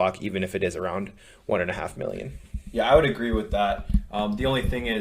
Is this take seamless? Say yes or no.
yes